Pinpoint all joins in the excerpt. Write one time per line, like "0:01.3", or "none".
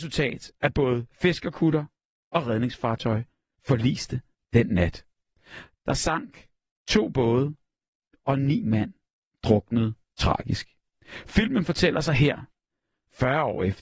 none

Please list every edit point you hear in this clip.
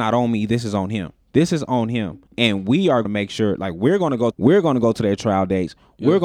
0:01.2
0:02.3
0:03.0
0:04.3

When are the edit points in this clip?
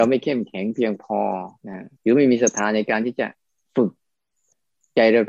0:01.6
0:02.0

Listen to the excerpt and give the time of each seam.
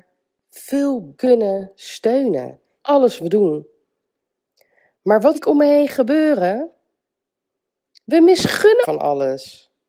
0:01.2
0:02.8
0:03.2
0:05.3
0:08.8

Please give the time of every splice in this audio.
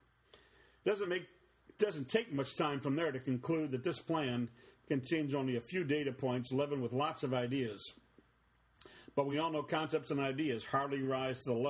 none

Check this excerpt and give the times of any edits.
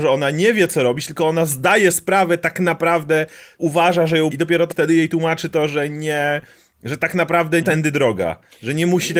0:01.9
0:03.6
0:04.3
0:04.7
0:07.6

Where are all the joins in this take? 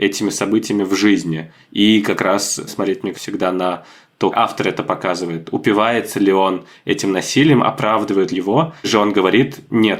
0:02.7
0:03.1
0:04.3
0:08.3
0:08.8

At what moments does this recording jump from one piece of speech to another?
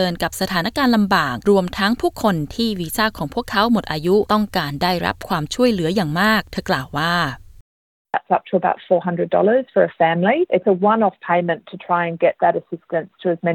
none

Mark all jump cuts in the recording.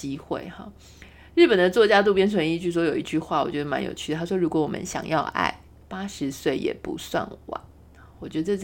none

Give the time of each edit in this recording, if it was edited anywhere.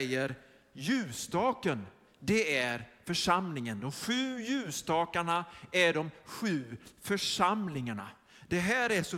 none

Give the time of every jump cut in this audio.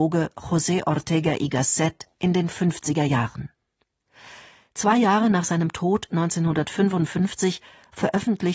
none

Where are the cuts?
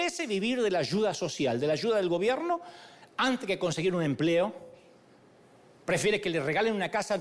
none

